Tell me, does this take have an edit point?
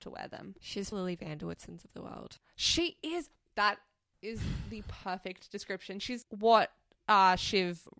yes; 2 cuts; at 0.9 s, 6.2 s

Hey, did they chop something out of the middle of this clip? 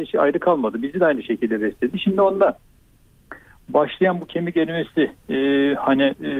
no; 0 cuts

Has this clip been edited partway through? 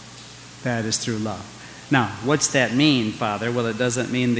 no; 0 cuts

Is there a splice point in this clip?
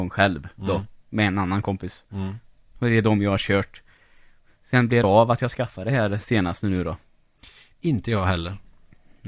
yes; 1 cut; at 5.0 s

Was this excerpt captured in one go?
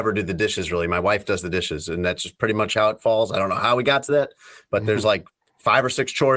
yes; 0 cuts

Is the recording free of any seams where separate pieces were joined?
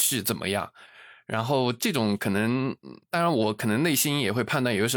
no; 1 cut; at 3.0 s

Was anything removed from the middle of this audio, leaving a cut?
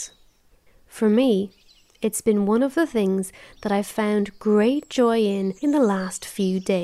yes; 1 cut; at 5.6 s

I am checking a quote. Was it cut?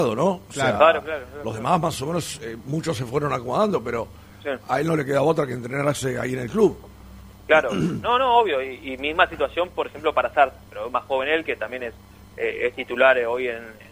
no; 0 cuts

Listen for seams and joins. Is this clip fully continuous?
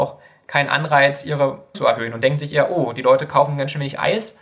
no; 1 cut; at 1.7 s

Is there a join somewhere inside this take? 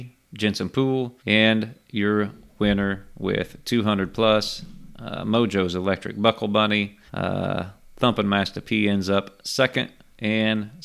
yes; 2 cuts; at 1.2 s, 7.1 s

